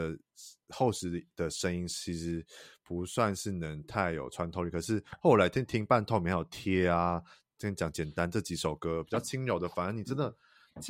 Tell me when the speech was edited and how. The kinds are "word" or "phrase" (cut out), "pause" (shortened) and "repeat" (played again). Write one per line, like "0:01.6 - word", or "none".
none